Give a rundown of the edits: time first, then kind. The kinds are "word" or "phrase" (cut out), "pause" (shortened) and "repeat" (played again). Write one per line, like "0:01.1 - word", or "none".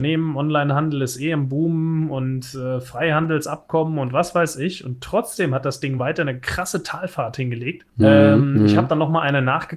none